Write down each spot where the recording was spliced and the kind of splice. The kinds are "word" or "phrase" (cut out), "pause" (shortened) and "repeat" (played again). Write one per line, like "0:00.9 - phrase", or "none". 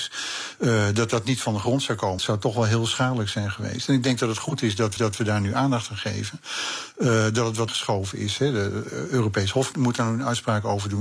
0:02.2 - word
0:05.0 - repeat
0:07.7 - phrase
0:09.7 - word

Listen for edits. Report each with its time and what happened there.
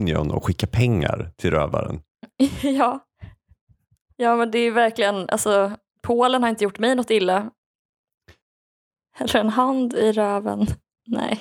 none

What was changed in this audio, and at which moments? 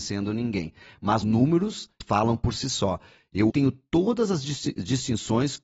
0:01.2 - word
0:02.0 - word
0:03.5 - word

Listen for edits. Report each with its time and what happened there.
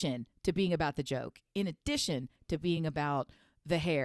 none

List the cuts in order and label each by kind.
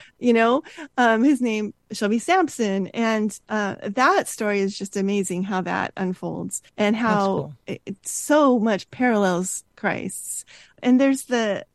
0:06.7 - pause

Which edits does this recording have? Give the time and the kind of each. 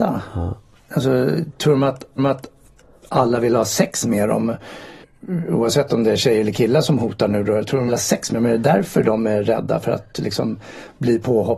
0:02.2 - repeat
0:05.0 - pause
0:07.9 - phrase

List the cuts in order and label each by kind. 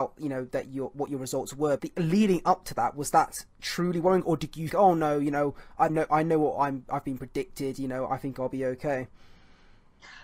0:01.8 - word
0:04.7 - word
0:05.9 - word

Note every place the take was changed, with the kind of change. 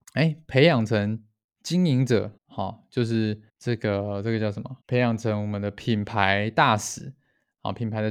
0:01.4 - pause
0:02.4 - pause
0:03.5 - pause
0:04.8 - pause

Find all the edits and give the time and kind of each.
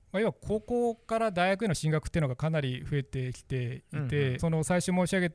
0:04.4 - phrase

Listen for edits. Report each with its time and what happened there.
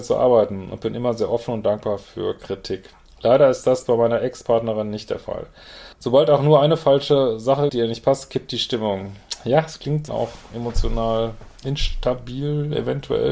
0:03.1 - pause
0:05.9 - pause
0:07.7 - phrase
0:10.1 - phrase

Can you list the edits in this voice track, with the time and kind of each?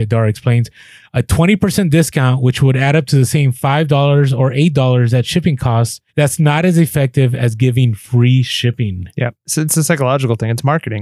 0:06.1 - pause

